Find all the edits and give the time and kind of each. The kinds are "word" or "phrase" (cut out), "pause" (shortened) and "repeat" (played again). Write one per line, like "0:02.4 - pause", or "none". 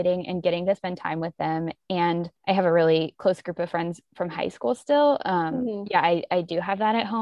0:02.4 - pause